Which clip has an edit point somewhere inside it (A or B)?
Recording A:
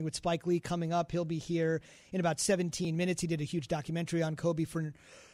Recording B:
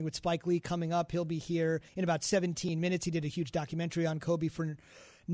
B